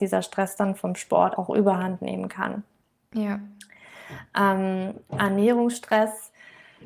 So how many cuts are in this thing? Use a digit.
1